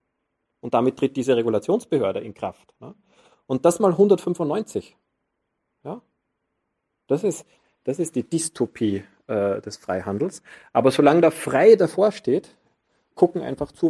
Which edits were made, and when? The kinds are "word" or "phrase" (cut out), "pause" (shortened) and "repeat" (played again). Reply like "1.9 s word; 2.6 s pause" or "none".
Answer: 5.6 s pause